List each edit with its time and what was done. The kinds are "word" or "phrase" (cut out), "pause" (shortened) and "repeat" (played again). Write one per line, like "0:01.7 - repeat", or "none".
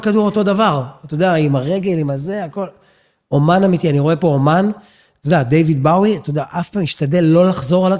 none